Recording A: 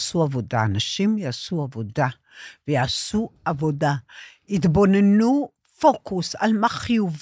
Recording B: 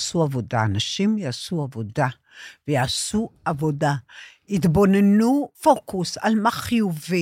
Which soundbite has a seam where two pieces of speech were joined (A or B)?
B